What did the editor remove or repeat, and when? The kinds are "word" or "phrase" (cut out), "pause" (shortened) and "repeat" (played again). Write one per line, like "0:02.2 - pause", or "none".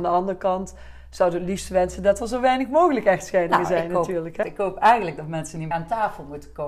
0:04.4 - word
0:05.7 - word